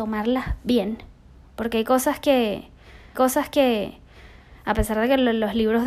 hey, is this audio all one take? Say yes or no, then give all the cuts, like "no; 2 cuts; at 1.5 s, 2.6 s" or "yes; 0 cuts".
no; 1 cut; at 3.1 s